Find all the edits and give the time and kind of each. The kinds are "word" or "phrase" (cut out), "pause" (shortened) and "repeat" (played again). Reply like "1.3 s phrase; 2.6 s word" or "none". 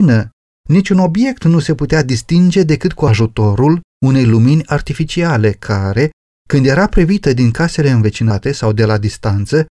none